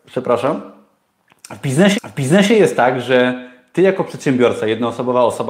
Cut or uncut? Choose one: cut